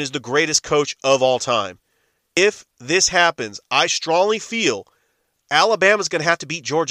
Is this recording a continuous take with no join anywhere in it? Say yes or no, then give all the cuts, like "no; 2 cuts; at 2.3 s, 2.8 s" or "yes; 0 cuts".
yes; 0 cuts